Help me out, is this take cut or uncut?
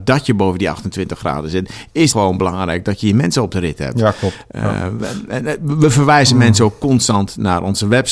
cut